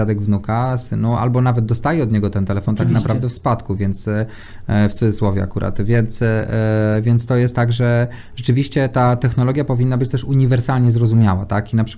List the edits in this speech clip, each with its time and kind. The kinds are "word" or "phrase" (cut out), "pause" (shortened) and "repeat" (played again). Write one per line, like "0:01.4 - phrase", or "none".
none